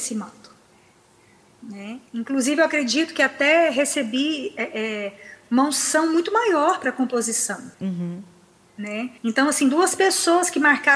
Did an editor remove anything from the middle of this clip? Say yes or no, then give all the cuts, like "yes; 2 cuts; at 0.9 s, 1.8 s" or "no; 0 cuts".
yes; 3 cuts; at 2.1 s, 7.7 s, 9.2 s